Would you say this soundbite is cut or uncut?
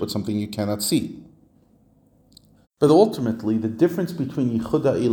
uncut